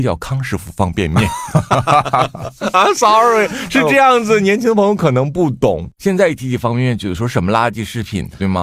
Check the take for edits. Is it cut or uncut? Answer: uncut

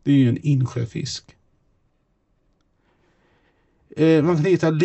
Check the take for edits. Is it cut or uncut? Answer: uncut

